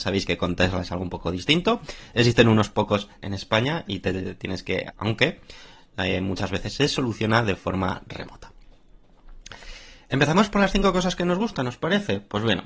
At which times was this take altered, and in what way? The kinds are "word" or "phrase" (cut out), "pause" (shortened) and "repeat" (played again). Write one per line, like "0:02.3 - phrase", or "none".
0:03.2 - phrase
0:04.9 - phrase

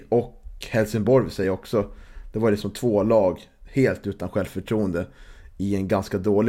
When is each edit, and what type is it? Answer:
none

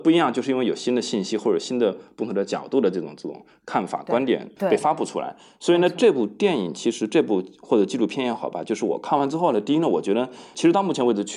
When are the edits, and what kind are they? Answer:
none

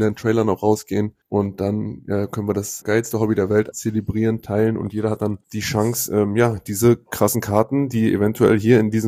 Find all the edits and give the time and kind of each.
0:01.2 - pause
0:02.8 - word
0:03.7 - phrase
0:05.4 - pause

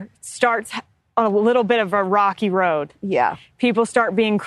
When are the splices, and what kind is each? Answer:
none

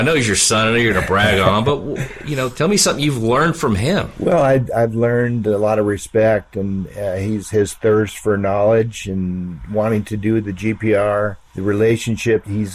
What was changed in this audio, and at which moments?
none

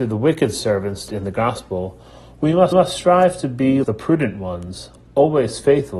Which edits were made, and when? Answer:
0:01.1 - word
0:02.7 - repeat
0:03.8 - word

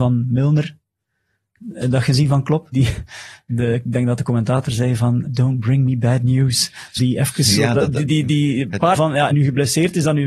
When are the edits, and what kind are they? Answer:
0:02.7 - word
0:05.2 - word
0:07.0 - word
0:08.0 - word
0:08.9 - word
0:09.3 - phrase

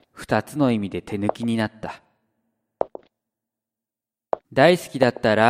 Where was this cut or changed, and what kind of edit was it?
0:04.4 - pause

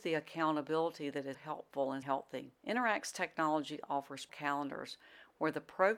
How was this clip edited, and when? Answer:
0:01.3 - word
0:02.0 - word
0:02.6 - pause
0:04.3 - word

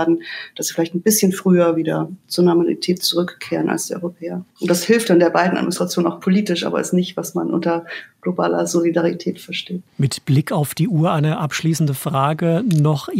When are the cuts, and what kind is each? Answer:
0:04.5 - pause
0:09.9 - pause

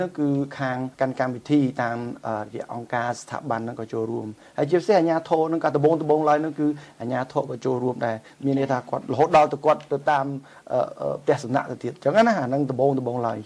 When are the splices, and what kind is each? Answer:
0:00.9 - pause

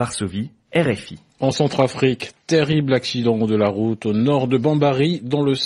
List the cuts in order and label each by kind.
none

